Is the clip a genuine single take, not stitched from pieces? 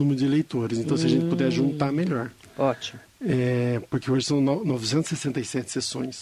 yes; 0 cuts

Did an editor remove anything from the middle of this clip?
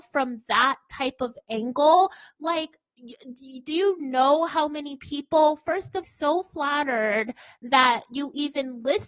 yes; 1 cut; at 6.0 s

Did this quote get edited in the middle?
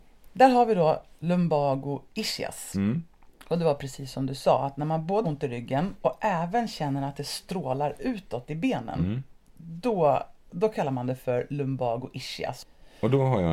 yes; 1 cut; at 5.2 s

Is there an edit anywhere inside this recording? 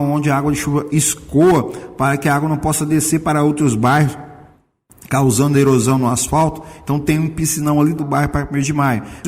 yes; 1 cut; at 8.0 s

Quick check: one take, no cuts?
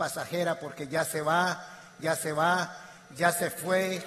no; 1 cut; at 2.0 s

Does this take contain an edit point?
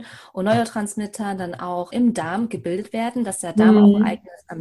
yes; 1 cut; at 1.9 s

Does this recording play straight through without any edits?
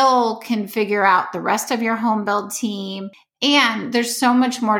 yes; 0 cuts

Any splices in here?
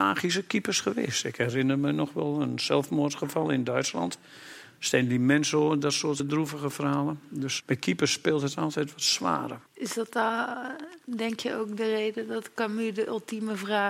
yes; 3 cuts; at 6.2 s, 7.6 s, 9.7 s

